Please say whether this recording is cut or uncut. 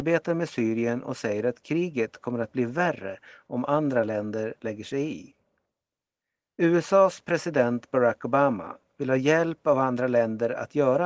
uncut